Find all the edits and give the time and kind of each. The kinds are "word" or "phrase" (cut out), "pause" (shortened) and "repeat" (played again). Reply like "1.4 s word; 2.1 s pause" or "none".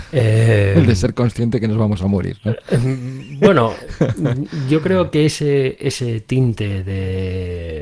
none

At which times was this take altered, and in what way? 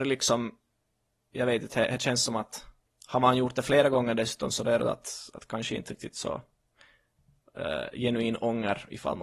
none

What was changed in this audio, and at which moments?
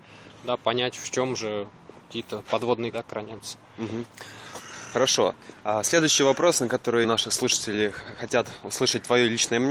2.9 s word; 7.0 s phrase

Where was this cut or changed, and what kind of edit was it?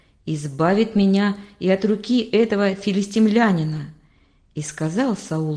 none

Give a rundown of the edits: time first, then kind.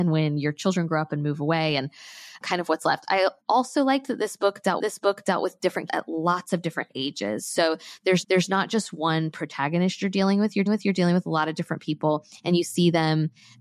2.4 s word; 3.4 s pause; 4.8 s repeat; 5.9 s word; 8.2 s repeat; 10.7 s repeat

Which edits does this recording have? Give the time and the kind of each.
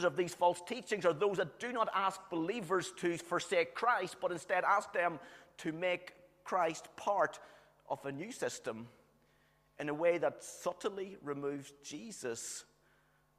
none

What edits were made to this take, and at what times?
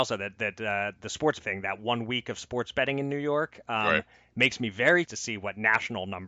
1.4 s word; 5.1 s word

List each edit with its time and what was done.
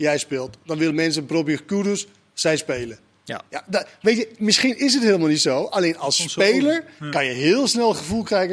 none

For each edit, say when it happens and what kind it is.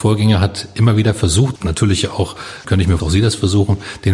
1.6 s word; 2.6 s word; 3.0 s phrase

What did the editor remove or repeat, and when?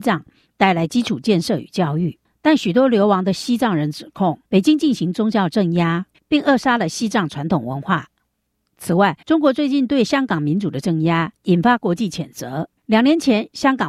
2.2 s pause; 4.5 s pause; 6.1 s phrase; 9.2 s pause; 11.4 s pause; 12.8 s pause

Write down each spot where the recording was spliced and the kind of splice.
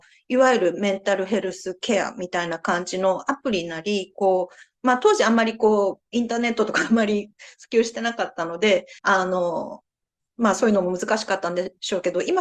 6.1 s pause; 9.0 s pause

